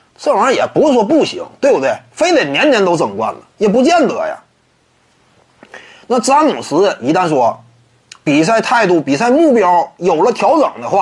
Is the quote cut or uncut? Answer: uncut